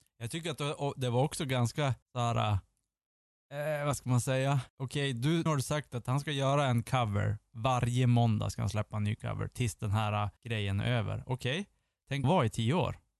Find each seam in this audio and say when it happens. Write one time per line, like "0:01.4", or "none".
0:02.0
0:04.7
0:05.5
0:10.4
0:12.2

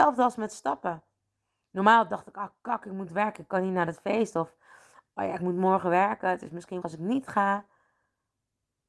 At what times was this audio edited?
0:06.8

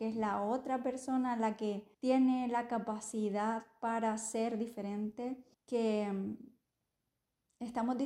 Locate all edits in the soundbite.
0:01.9
0:05.5

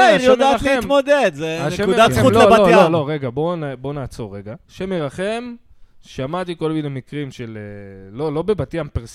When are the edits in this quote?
0:04.6

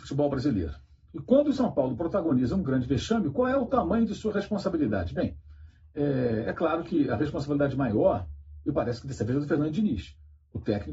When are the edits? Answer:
none

